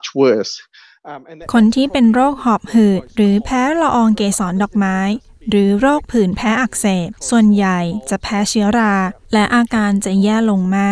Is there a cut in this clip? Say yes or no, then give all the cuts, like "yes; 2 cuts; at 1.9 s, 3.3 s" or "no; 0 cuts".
no; 0 cuts